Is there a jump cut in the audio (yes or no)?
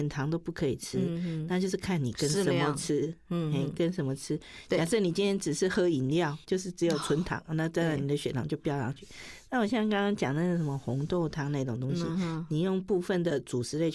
yes